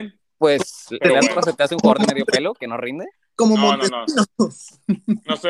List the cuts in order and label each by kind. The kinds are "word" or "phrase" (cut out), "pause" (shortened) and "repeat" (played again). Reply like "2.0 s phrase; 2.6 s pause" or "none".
none

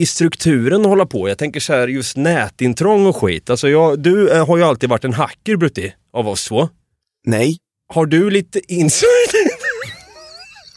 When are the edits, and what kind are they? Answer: none

